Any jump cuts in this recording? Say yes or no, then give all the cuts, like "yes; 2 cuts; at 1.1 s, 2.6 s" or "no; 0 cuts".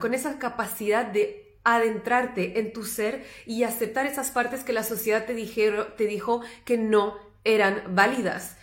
no; 0 cuts